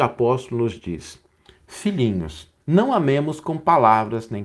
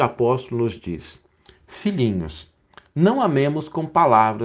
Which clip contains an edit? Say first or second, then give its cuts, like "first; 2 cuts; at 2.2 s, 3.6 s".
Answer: first; 1 cut; at 2.6 s